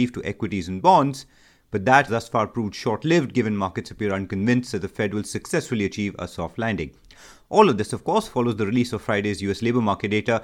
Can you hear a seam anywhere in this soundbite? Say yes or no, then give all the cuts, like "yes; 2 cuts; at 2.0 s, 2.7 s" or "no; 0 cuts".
yes; 1 cut; at 2.1 s